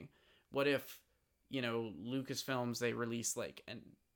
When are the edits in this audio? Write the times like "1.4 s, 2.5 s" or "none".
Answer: none